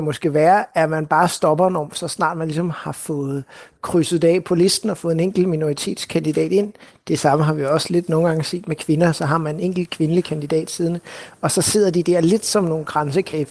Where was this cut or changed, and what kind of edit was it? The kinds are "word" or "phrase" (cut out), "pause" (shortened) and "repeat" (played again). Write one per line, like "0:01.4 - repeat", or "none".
none